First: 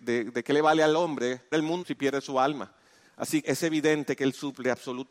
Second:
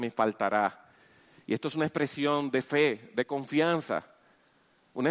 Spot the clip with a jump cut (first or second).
first